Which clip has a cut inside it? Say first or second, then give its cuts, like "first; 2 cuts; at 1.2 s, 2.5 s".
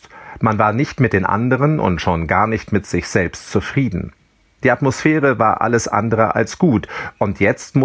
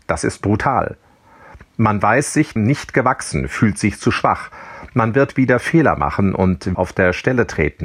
second; 2 cuts; at 2.6 s, 6.7 s